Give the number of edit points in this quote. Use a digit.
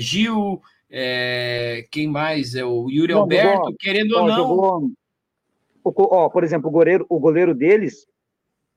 0